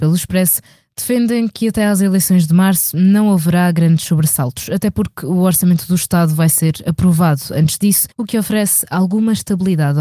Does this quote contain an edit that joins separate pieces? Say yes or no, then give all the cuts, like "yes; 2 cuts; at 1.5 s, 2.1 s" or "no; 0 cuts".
yes; 1 cut; at 8.1 s